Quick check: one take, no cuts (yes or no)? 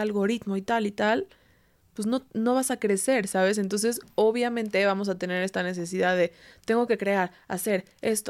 yes